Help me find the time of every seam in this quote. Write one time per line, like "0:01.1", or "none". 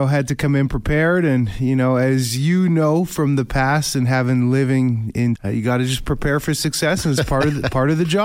0:05.4